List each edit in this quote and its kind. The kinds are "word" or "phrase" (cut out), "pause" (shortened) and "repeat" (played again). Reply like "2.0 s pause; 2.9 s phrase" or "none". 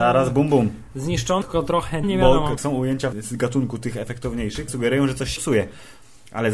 1.4 s word; 2.0 s word; 2.6 s word; 3.1 s word; 4.7 s word; 5.4 s word

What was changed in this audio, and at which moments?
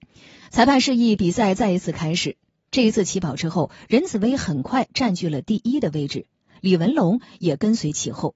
none

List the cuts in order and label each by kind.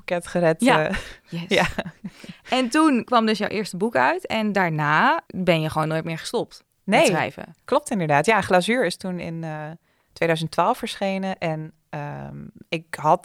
none

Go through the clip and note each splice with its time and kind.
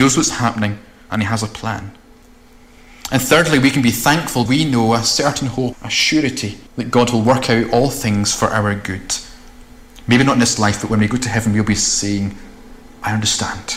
4.5 s word; 5.7 s word; 6.7 s pause

